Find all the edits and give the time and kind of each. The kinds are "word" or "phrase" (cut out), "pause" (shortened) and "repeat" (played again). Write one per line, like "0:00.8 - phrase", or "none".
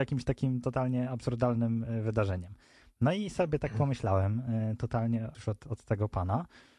0:05.3 - word